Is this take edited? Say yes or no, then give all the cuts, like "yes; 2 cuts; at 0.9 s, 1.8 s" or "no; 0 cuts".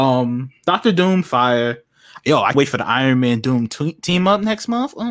yes; 1 cut; at 2.5 s